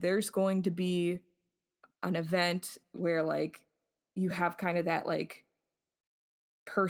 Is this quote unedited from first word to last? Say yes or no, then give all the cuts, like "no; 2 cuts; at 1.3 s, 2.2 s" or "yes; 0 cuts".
yes; 0 cuts